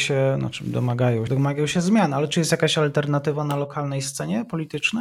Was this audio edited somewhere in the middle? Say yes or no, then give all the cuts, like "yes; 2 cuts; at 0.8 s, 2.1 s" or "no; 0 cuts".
yes; 1 cut; at 1.3 s